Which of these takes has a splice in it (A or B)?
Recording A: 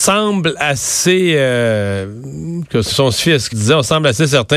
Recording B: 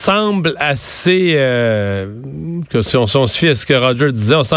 A